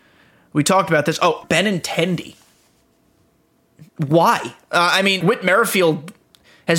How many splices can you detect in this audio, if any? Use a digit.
2